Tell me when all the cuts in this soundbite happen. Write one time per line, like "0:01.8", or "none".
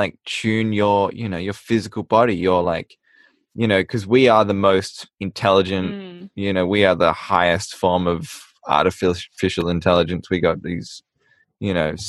none